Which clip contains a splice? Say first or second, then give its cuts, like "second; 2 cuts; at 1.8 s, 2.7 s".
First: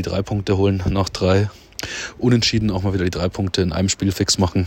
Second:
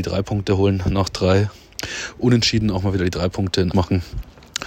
second; 1 cut; at 3.7 s